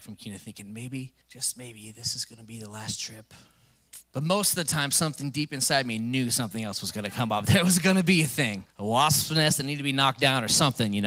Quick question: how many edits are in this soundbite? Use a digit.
3